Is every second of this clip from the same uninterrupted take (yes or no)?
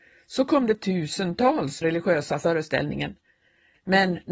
no